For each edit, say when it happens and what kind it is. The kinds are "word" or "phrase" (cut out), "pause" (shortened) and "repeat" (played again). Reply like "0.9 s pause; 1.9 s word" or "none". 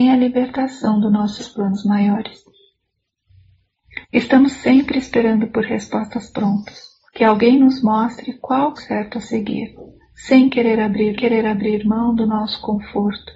1.4 s phrase; 4.0 s pause; 7.1 s pause; 8.8 s word; 10.0 s pause; 11.2 s repeat

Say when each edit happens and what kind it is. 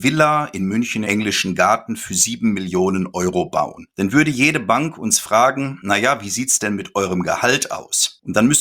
1.0 s word

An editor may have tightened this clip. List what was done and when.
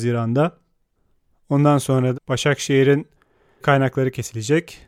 2.1 s word; 3.6 s word

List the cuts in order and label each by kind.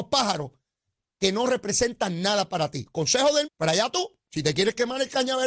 3.4 s word

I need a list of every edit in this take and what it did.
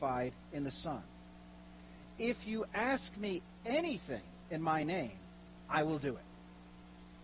none

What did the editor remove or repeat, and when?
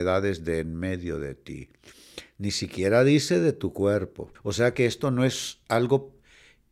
4.3 s pause

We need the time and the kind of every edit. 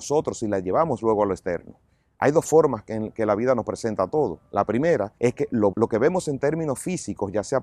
5.2 s pause; 5.7 s word

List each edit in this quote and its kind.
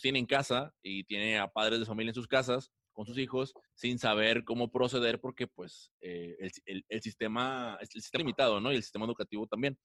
3.7 s pause; 8.2 s word

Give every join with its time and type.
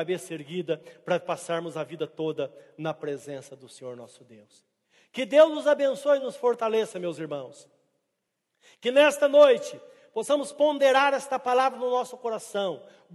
none

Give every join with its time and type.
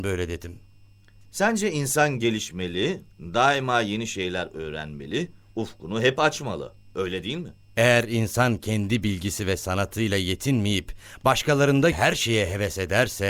11.9 s word

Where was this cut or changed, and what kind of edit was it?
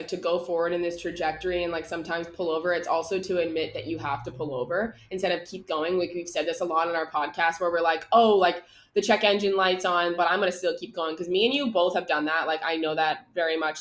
none

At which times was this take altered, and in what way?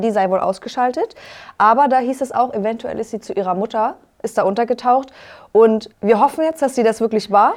5.9 s pause

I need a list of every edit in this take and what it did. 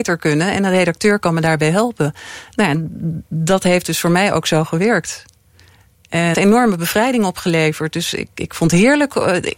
6.3 s phrase

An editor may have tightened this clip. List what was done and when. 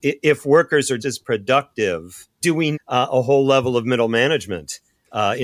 1.0 s word; 2.4 s phrase; 2.7 s word

